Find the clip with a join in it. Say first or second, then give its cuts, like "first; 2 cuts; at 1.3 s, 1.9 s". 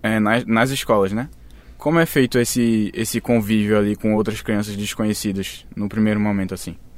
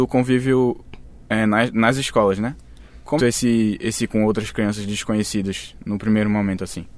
second; 2 cuts; at 3.2 s, 4.1 s